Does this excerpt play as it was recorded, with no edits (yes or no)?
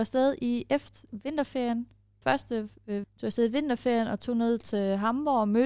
no